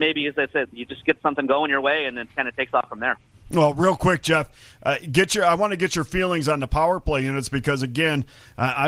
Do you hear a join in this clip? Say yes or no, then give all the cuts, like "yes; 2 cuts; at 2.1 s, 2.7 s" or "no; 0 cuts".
no; 0 cuts